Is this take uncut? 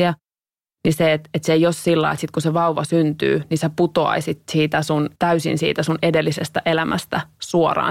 no; 1 cut; at 5.2 s

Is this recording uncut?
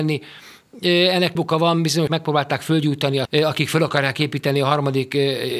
no; 3 cuts; at 1.4 s, 2.1 s, 3.3 s

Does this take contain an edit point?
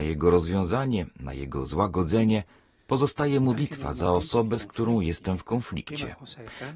no; 0 cuts

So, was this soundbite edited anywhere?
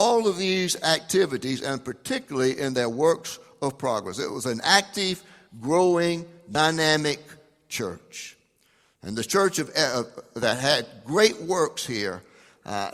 no; 0 cuts

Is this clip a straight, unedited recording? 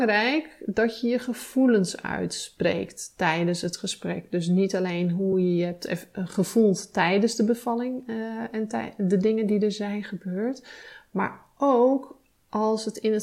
yes; 0 cuts

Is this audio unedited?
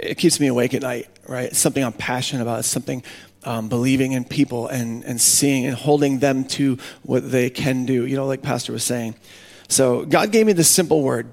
yes; 0 cuts

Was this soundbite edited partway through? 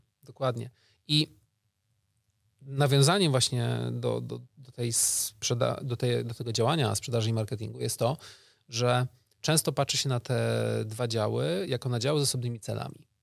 no; 0 cuts

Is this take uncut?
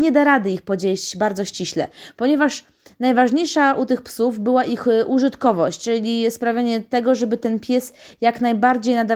yes; 0 cuts

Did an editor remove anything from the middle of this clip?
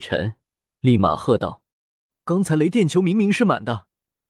yes; 1 cut; at 1.7 s

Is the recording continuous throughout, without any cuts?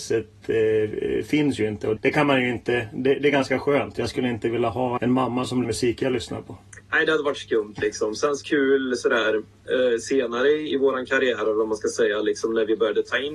no; 6 cuts; at 2.0 s, 5.0 s, 5.6 s, 6.8 s, 8.4 s, 10.7 s

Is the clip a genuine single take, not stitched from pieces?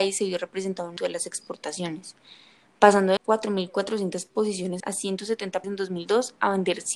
no; 4 cuts; at 1.0 s, 3.2 s, 4.8 s, 5.6 s

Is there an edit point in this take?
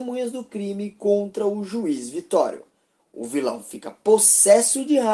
no; 0 cuts

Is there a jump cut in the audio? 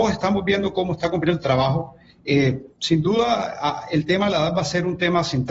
no; 0 cuts

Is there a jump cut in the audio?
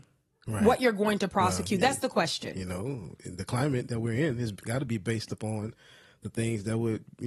no; 0 cuts

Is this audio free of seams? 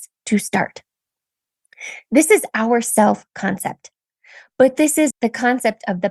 no; 1 cut; at 5.1 s

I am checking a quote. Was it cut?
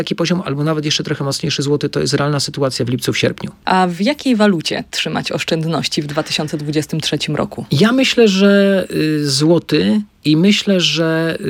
no; 0 cuts

